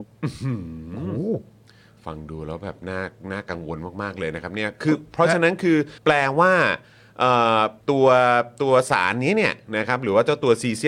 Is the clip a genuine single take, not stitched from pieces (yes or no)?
no